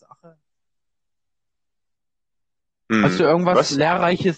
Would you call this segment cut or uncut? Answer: uncut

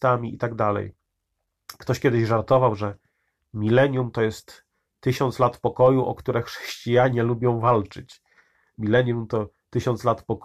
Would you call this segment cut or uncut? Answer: uncut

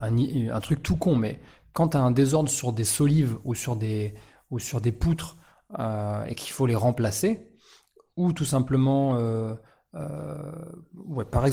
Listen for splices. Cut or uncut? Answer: uncut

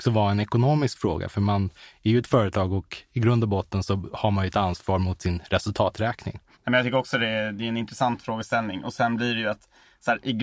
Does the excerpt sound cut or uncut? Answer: uncut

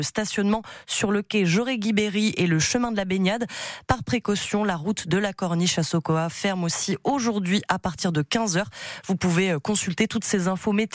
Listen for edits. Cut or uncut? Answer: uncut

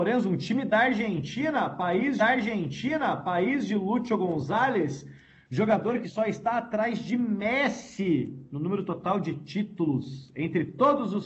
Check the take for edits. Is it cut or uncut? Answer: cut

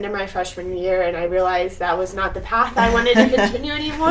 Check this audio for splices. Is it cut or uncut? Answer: uncut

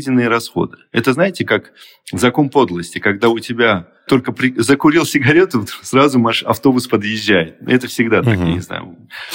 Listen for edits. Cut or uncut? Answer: uncut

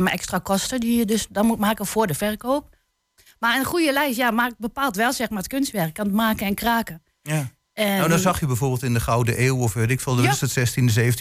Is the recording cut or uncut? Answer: uncut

